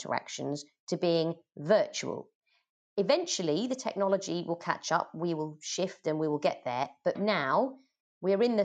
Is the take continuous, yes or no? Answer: no